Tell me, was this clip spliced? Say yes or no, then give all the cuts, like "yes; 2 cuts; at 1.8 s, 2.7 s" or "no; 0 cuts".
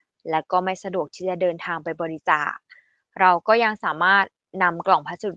no; 0 cuts